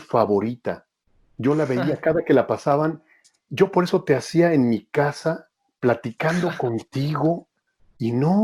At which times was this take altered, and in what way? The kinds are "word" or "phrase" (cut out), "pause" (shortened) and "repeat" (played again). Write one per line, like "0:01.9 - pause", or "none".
none